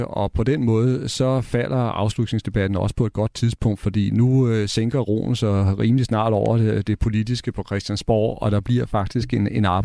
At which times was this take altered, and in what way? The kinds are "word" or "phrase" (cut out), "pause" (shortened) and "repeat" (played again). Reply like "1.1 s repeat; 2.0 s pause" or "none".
none